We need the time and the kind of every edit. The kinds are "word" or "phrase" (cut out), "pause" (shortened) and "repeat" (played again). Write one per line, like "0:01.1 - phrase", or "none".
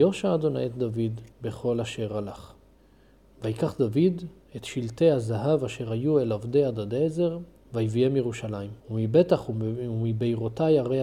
0:01.3 - pause
0:02.8 - pause
0:07.6 - pause
0:08.8 - pause